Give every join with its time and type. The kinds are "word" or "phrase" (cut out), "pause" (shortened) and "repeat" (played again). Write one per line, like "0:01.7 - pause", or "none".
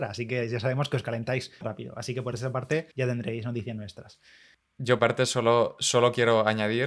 0:01.6 - word
0:02.9 - pause
0:05.0 - phrase